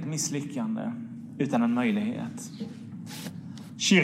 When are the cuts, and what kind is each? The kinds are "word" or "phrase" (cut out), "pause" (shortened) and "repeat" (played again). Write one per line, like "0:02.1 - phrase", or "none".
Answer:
none